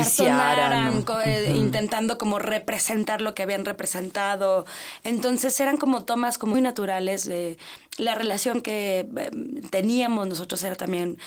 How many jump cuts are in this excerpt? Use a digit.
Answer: 1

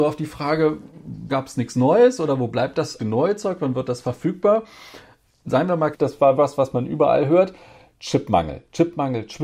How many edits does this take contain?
4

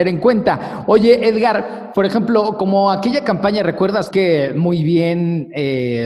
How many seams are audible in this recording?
1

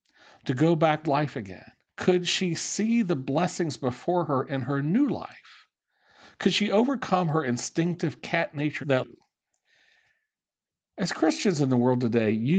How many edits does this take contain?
3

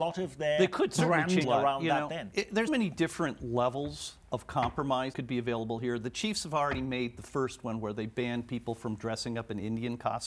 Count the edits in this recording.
4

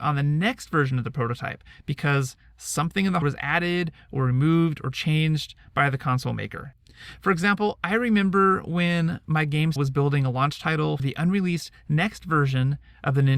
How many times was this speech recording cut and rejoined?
3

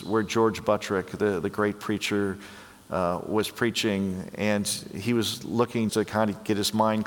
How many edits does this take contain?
1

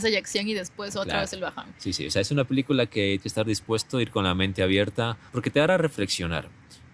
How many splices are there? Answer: 2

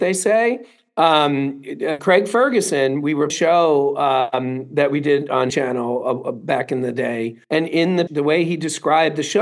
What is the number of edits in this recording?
5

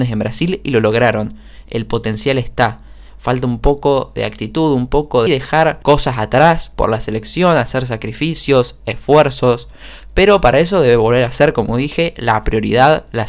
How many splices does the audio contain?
1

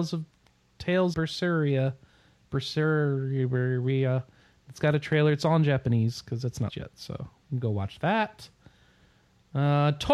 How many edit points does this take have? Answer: 2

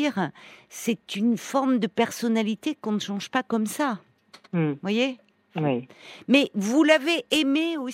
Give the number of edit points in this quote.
3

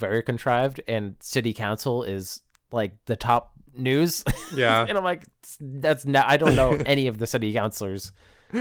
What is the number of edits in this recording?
1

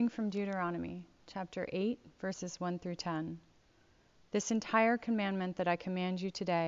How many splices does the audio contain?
0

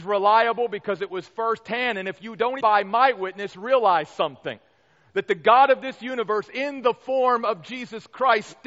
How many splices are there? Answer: 1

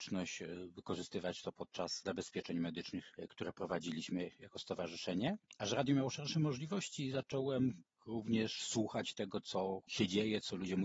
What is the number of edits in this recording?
0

